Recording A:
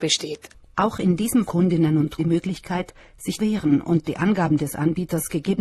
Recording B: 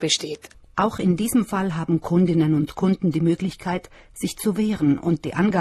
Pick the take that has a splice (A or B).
A